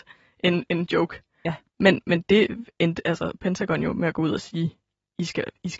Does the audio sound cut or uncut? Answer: uncut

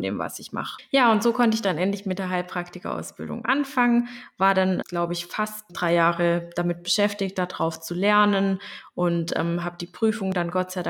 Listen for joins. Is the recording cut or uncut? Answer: cut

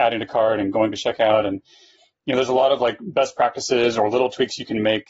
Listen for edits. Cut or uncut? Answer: uncut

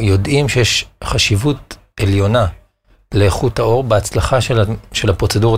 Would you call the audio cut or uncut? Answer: uncut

